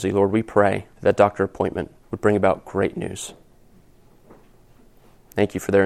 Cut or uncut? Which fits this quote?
cut